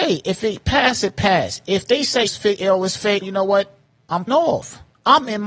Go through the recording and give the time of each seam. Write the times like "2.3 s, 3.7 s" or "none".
2.3 s, 3.2 s, 4.3 s